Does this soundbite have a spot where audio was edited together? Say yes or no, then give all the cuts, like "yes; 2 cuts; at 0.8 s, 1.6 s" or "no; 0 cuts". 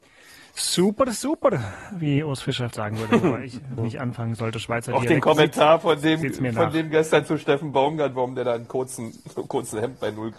yes; 2 cuts; at 2.7 s, 3.8 s